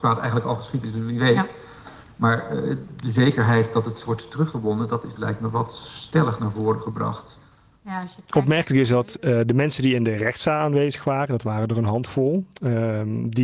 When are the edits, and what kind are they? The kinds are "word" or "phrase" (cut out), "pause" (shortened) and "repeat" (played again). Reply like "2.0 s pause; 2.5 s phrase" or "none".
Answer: none